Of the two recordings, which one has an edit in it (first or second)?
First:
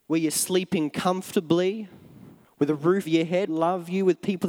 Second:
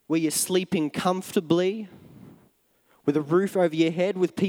first